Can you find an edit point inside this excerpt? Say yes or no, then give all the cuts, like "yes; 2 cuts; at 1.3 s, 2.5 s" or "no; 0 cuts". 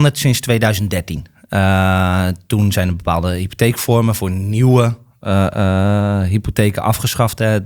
no; 0 cuts